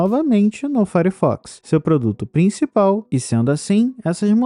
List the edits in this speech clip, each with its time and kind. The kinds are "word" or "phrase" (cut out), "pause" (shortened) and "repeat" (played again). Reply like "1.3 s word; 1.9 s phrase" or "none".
none